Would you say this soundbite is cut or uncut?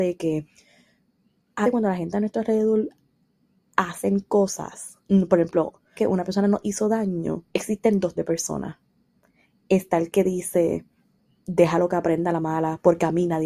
cut